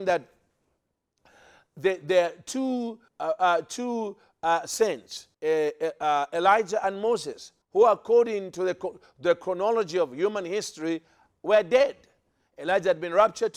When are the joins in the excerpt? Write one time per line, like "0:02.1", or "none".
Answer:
0:03.1
0:05.3
0:07.6